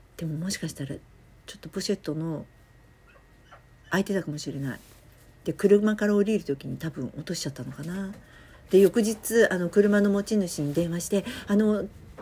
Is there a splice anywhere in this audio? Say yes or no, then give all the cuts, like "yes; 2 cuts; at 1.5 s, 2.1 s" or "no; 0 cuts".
no; 0 cuts